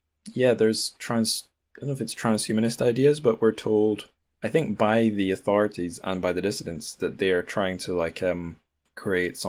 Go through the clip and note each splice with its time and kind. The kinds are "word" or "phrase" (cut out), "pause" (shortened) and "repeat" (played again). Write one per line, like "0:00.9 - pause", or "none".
none